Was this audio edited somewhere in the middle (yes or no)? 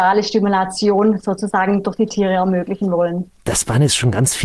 yes